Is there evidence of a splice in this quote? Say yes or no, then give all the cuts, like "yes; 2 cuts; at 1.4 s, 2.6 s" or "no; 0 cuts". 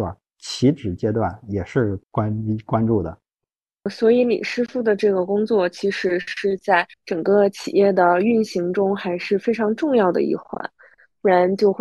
yes; 3 cuts; at 2.0 s, 3.6 s, 6.9 s